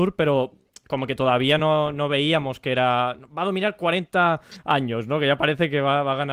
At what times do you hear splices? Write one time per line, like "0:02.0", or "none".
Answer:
none

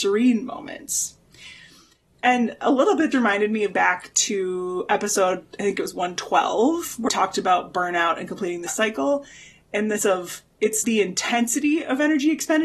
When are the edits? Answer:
0:03.1
0:03.7
0:07.1
0:08.7
0:10.0
0:10.8

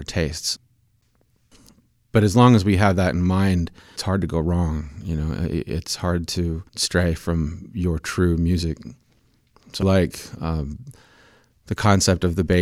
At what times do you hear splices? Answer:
0:04.0
0:06.7
0:09.8

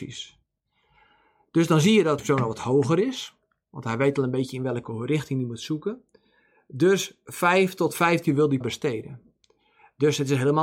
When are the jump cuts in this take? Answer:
0:02.2
0:08.3
0:08.6

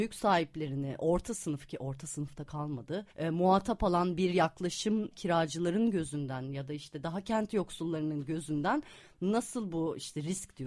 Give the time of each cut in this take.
0:03.1
0:05.1

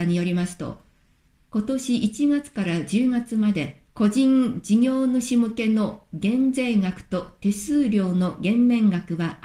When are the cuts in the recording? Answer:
0:03.9

